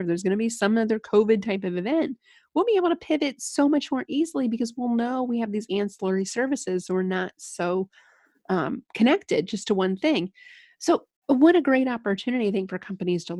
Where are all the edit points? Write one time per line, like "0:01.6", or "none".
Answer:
none

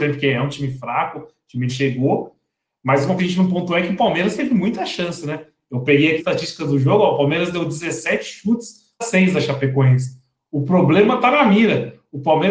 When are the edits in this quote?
0:01.7
0:03.2
0:04.4
0:06.2
0:09.0

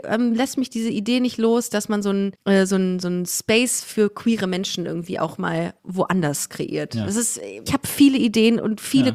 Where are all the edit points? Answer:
0:02.4
0:07.7

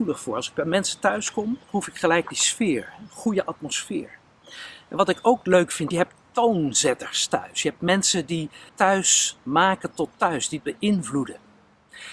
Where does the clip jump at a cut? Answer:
0:01.6
0:05.9
0:08.7
0:10.6

